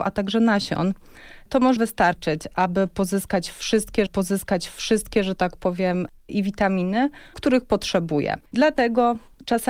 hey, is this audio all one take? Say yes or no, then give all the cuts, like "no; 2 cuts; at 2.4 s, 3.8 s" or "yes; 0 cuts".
no; 5 cuts; at 1.8 s, 4.1 s, 6.3 s, 7.3 s, 8.5 s